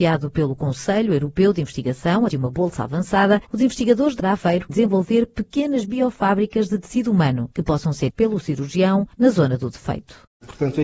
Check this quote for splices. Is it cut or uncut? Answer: cut